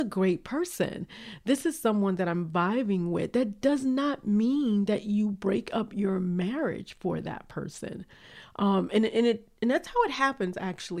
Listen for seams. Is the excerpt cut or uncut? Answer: uncut